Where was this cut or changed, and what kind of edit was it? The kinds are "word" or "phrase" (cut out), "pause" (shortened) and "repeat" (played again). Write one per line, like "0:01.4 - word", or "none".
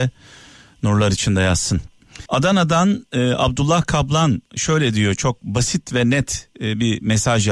0:02.3 - pause